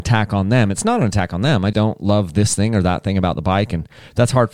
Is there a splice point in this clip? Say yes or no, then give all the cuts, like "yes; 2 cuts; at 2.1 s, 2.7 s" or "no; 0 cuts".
yes; 1 cut; at 1.7 s